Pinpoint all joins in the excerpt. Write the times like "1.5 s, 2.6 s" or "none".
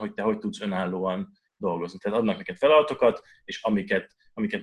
none